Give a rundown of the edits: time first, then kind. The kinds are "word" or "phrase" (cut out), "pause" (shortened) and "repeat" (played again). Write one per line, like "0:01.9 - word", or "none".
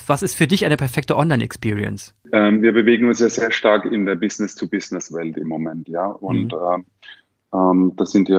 none